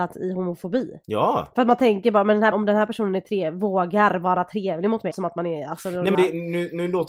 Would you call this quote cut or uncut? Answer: cut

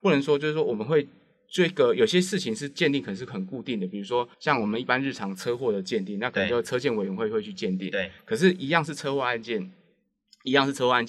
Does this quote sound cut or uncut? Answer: cut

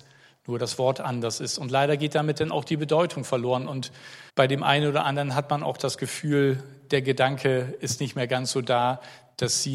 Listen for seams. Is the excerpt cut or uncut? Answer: cut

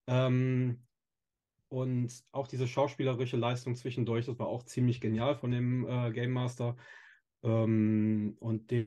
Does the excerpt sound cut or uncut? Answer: uncut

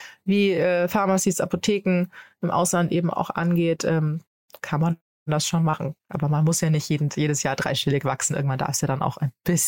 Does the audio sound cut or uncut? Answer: uncut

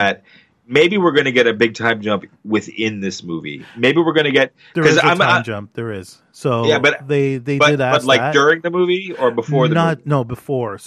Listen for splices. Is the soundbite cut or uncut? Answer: uncut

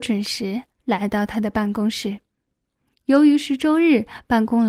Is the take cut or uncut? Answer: uncut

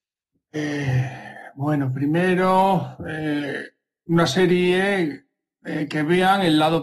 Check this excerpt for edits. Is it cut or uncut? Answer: uncut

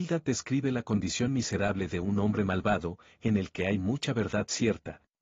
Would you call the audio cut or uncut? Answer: uncut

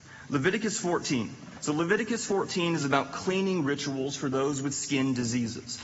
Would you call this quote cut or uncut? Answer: uncut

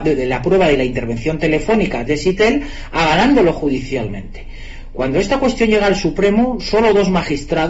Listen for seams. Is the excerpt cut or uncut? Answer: cut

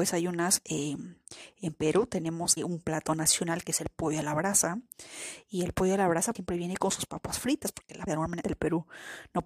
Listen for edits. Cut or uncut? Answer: cut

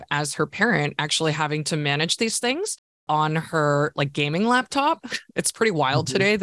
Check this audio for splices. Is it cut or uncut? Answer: uncut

